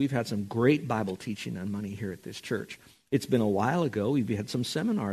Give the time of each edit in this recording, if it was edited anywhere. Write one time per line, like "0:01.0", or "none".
none